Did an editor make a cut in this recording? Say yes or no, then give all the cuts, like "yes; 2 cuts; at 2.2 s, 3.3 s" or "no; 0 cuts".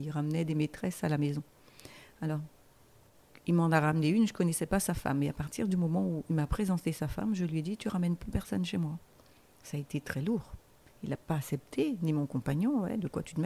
no; 0 cuts